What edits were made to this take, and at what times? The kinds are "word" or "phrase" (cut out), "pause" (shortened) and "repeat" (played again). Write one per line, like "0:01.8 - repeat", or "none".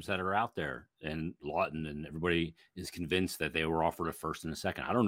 none

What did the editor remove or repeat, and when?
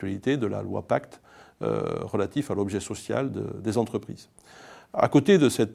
none

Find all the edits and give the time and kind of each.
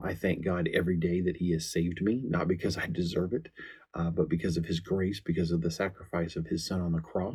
none

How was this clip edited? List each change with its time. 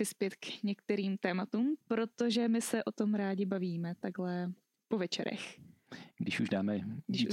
0:01.8 - pause

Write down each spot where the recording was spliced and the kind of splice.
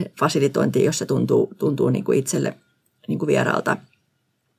none

